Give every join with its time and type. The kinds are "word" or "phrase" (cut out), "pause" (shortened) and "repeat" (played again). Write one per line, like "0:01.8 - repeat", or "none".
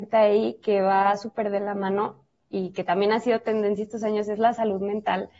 none